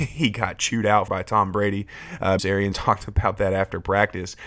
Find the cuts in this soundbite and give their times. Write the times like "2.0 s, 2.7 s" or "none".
1.1 s, 2.4 s, 2.7 s